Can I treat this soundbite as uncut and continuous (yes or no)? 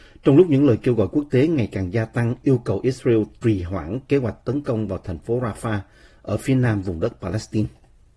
yes